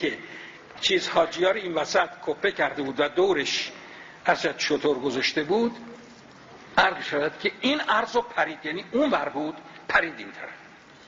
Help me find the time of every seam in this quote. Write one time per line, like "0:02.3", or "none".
none